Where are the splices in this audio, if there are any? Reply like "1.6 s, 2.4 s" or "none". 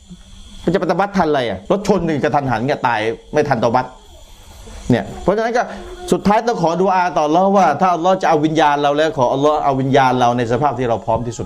1.7 s